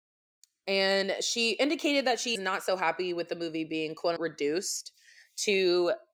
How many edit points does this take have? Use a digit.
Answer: 2